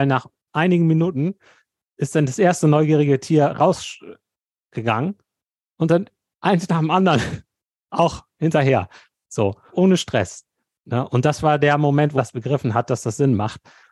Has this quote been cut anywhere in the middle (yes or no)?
yes